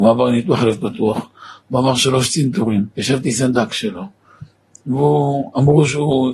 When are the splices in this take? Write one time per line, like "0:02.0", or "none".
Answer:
0:02.9